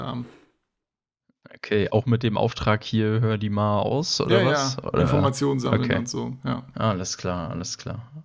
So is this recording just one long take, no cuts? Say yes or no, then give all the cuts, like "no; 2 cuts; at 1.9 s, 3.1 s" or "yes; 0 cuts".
yes; 0 cuts